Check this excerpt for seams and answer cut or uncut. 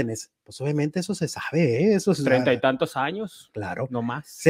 uncut